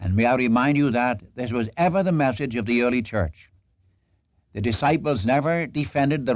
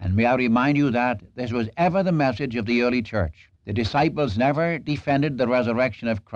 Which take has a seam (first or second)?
second